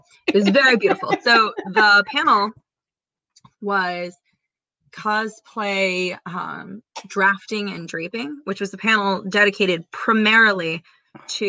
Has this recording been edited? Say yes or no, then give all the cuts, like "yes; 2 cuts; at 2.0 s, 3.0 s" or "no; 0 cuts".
no; 0 cuts